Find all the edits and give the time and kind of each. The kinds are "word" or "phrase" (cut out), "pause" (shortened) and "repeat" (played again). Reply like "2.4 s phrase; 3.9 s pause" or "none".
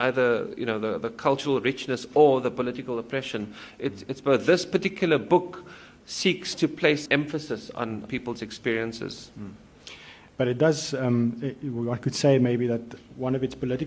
7.1 s phrase; 8.1 s word